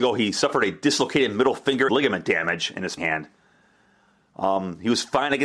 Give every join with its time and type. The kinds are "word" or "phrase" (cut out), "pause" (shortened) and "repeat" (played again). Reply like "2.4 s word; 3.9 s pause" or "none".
1.9 s word; 3.0 s word